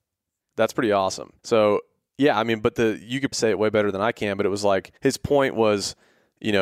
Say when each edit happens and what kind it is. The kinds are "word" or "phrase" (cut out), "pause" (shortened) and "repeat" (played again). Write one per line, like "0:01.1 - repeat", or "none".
0:01.4 - pause
0:03.3 - word
0:05.0 - pause